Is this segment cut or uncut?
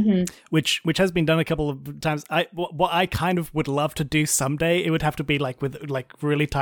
uncut